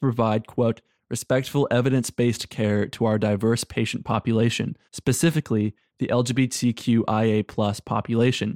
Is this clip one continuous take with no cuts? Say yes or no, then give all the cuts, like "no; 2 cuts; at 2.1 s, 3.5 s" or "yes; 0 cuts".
no; 1 cut; at 4.8 s